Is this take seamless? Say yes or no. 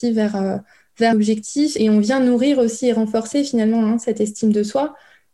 no